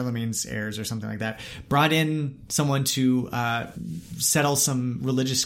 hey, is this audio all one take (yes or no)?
yes